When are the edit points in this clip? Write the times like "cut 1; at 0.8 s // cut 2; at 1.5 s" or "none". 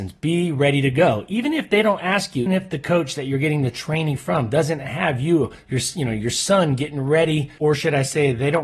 cut 1; at 2.5 s

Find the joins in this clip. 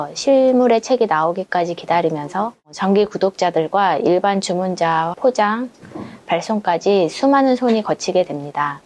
cut 1; at 5.1 s

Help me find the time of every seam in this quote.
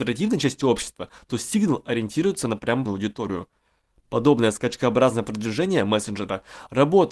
cut 1; at 2.9 s

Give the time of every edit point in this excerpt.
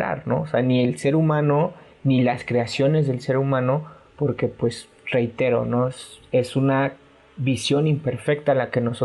none

